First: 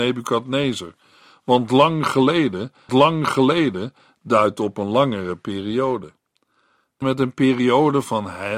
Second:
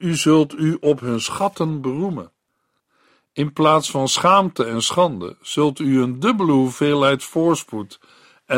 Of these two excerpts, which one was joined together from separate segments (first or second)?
first